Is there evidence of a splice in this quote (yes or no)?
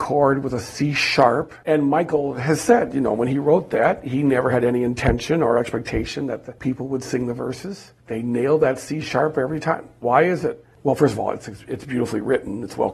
no